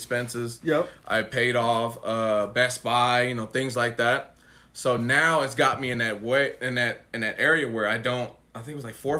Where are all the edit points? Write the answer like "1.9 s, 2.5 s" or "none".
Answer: none